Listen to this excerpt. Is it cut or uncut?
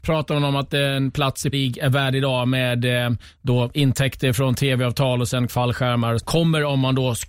cut